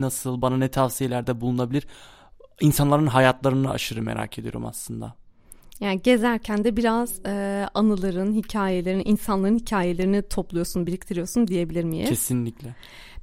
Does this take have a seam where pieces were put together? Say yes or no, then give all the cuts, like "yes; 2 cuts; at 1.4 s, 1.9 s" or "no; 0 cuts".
no; 0 cuts